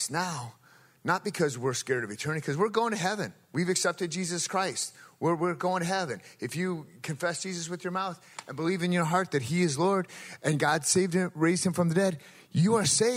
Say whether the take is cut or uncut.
uncut